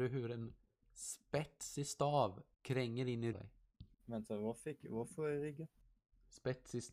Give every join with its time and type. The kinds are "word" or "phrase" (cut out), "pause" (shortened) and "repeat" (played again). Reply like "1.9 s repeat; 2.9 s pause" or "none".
2.5 s pause; 3.3 s phrase; 3.9 s pause